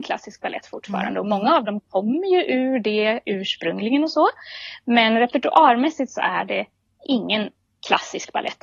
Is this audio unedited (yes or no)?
yes